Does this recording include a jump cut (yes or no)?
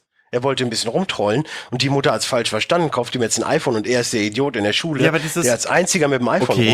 no